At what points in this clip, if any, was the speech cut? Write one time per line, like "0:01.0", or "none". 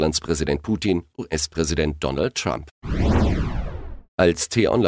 0:01.1